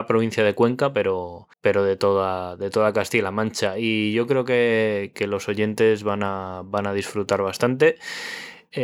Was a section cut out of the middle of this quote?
yes; 1 cut; at 1.5 s

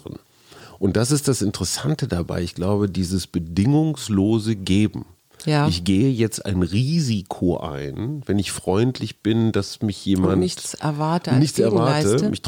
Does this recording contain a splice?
no; 0 cuts

